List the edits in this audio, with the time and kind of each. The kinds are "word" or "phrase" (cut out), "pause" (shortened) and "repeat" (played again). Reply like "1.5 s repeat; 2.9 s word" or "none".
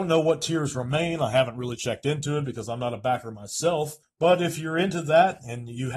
4.0 s pause

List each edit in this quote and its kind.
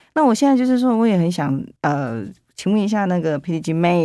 1.8 s pause

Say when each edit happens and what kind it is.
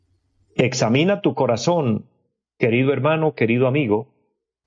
none

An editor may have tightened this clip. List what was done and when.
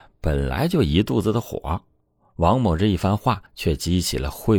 3.5 s pause

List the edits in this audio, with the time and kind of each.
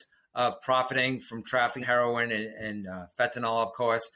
1.8 s word

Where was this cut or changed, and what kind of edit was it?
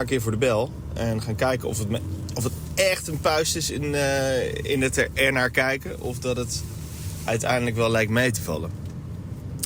none

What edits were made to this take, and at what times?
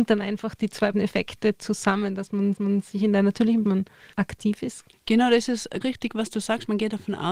0.9 s word; 2.6 s repeat; 3.6 s phrase; 4.1 s pause; 4.9 s pause; 5.8 s word

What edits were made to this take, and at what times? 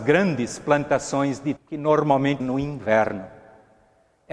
1.6 s word; 2.4 s word

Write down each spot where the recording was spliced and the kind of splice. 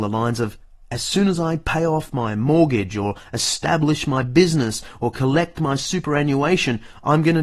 none

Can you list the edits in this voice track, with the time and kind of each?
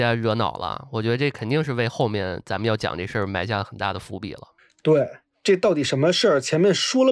none

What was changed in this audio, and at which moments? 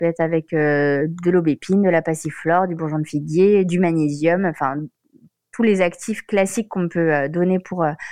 none

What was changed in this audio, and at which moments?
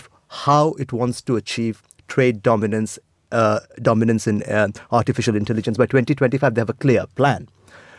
none

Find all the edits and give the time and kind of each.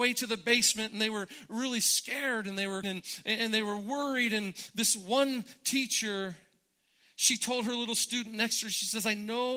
2.8 s word

